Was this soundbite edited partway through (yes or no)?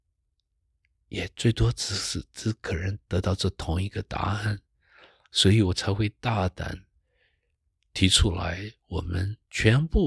no